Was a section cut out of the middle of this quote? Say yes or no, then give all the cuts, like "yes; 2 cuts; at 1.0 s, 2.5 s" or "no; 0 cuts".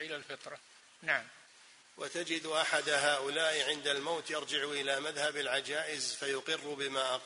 no; 0 cuts